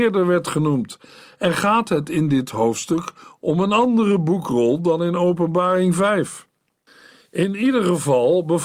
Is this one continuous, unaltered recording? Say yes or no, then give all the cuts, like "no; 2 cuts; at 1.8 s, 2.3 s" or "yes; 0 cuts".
yes; 0 cuts